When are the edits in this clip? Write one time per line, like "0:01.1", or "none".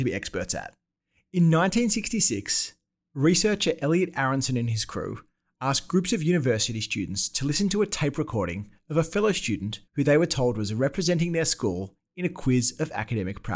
0:09.9